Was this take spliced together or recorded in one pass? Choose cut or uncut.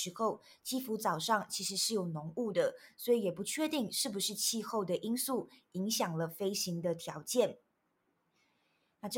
uncut